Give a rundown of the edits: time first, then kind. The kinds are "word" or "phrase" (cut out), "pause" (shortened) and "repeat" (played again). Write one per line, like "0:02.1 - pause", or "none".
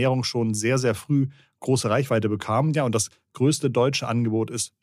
none

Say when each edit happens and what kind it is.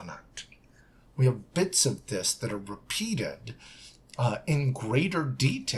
none

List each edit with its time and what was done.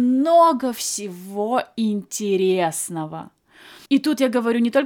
0:03.9 - pause

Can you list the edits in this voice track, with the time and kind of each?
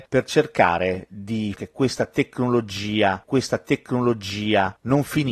0:01.5 - phrase
0:03.2 - repeat

